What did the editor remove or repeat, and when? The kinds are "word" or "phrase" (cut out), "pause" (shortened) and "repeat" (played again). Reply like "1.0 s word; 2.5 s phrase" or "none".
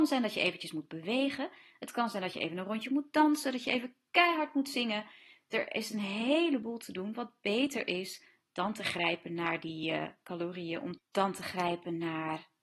none